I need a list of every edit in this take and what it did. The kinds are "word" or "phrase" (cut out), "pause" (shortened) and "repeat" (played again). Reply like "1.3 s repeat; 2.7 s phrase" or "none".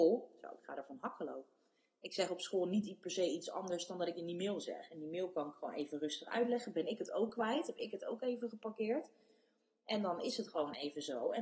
none